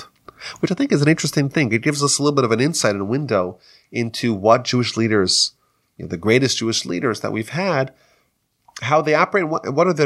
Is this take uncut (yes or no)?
yes